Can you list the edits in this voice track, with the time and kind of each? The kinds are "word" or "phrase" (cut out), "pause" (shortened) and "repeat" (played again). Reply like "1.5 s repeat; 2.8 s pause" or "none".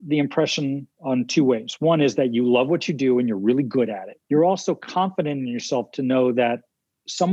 4.2 s pause